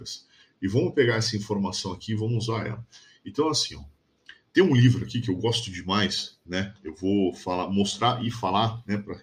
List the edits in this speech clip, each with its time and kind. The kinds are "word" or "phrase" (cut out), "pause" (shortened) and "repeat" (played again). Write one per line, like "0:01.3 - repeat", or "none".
none